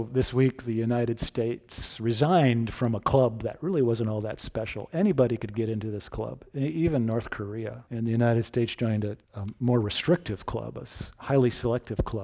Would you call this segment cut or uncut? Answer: cut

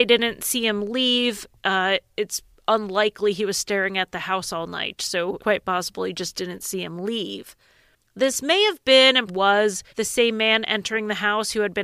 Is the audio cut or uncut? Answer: cut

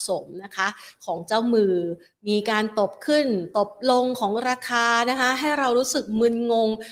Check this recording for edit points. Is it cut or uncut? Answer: uncut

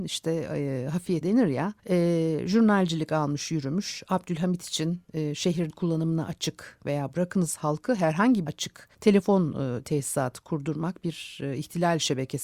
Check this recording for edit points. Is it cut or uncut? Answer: cut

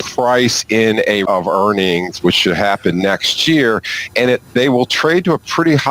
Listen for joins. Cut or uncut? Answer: cut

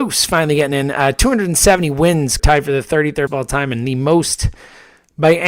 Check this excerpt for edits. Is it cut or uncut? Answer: cut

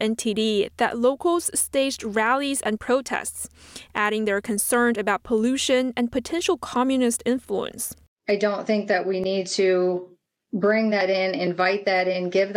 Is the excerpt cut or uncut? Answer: uncut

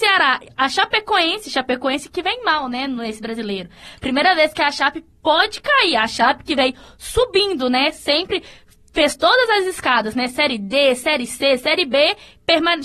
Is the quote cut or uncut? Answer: uncut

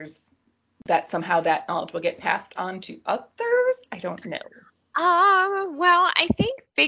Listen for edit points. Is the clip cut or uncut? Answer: uncut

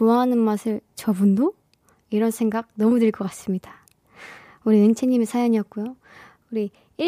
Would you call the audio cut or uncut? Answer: uncut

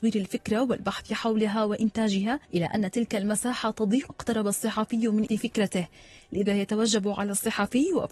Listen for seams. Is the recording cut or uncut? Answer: cut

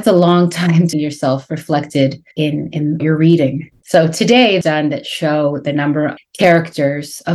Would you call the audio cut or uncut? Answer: cut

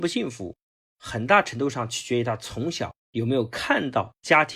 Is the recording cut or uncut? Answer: cut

